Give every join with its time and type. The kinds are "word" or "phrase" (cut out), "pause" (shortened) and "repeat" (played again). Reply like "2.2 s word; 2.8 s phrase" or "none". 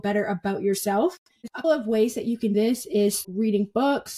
1.6 s word; 2.5 s word; 3.2 s word